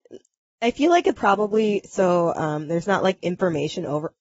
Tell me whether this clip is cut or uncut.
cut